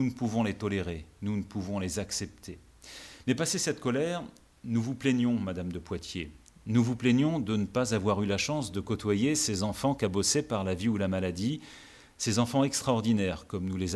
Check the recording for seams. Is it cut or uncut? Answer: uncut